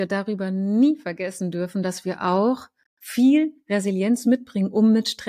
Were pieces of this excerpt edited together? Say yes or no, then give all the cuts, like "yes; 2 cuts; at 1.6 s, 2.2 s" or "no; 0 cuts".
no; 0 cuts